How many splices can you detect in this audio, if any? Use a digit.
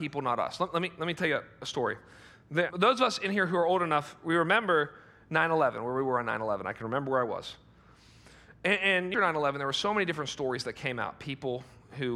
2